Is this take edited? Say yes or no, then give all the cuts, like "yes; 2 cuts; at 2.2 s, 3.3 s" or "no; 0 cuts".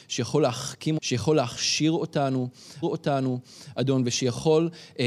yes; 2 cuts; at 1.0 s, 2.8 s